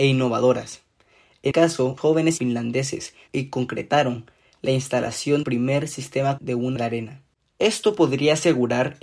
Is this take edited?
yes; 7 cuts; at 1.5 s, 2.0 s, 2.4 s, 3.3 s, 5.4 s, 6.4 s, 6.8 s

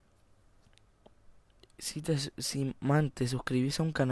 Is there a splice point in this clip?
no; 0 cuts

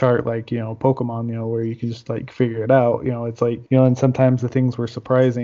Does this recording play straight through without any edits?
no; 1 cut; at 3.7 s

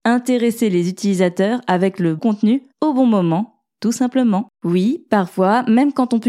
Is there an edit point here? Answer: yes; 3 cuts; at 2.2 s, 2.7 s, 4.5 s

